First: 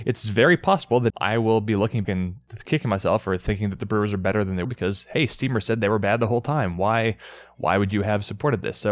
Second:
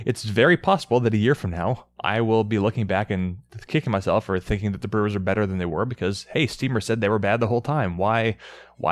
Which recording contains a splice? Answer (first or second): first